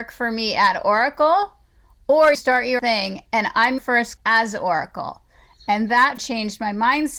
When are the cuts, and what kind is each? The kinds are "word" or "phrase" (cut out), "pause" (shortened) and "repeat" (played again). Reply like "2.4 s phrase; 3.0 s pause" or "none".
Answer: 2.3 s word; 2.8 s word; 3.8 s word; 4.2 s word; 6.2 s word